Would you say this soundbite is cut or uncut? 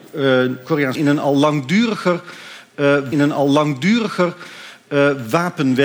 cut